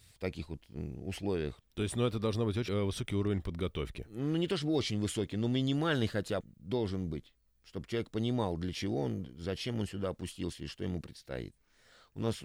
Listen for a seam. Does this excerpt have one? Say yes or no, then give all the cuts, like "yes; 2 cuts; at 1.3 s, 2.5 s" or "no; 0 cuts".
yes; 3 cuts; at 1.6 s, 2.7 s, 6.4 s